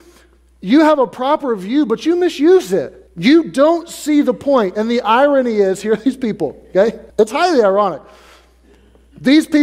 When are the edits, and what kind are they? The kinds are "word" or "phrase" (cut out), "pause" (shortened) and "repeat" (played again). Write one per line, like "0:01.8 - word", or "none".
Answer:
0:03.1 - pause
0:07.1 - pause